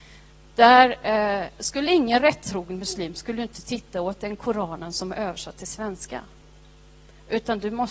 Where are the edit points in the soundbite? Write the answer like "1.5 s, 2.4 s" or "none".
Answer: none